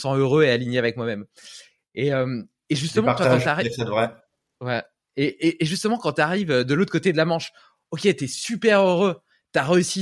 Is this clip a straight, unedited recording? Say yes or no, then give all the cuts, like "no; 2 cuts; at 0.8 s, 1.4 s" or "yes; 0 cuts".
yes; 0 cuts